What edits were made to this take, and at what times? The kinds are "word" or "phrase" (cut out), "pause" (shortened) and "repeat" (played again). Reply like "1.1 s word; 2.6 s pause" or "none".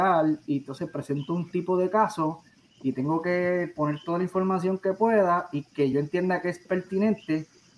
none